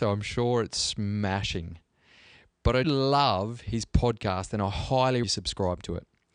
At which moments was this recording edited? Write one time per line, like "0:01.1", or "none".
0:02.8
0:05.2